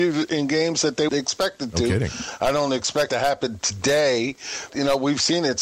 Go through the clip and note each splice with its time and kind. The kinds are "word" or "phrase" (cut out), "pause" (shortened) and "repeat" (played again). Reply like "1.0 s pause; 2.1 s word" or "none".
1.1 s word; 3.1 s word; 4.7 s word